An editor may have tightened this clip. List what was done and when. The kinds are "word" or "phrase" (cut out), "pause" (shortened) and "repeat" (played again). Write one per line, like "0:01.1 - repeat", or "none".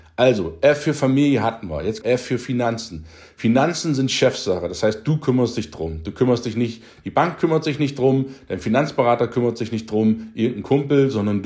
0:02.0 - word